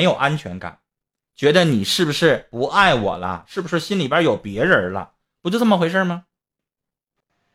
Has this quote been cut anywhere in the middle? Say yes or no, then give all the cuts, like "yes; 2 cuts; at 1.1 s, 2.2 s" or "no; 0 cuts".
no; 0 cuts